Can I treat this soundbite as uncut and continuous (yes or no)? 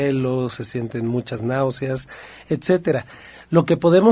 yes